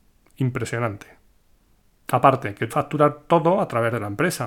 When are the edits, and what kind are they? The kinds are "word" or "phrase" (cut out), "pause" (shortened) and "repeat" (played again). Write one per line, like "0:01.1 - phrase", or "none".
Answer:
0:02.7 - word